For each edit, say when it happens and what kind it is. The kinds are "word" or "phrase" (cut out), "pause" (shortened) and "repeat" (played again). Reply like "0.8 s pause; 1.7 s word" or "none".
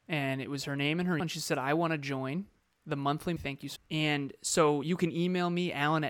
1.2 s word; 3.4 s phrase; 3.8 s word